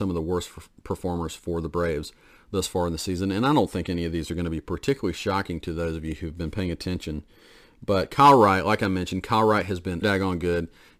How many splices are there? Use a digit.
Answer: 1